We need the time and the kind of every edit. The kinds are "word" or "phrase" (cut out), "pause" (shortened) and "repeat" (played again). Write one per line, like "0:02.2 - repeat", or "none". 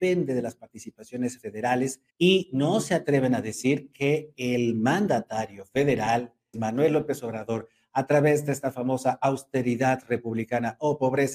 0:02.1 - pause
0:06.5 - word